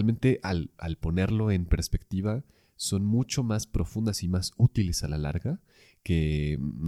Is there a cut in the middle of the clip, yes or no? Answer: no